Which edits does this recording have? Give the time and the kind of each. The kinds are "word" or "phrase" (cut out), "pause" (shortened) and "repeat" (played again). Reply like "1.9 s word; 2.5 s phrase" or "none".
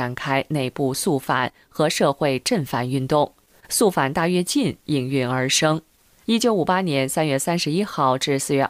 5.9 s pause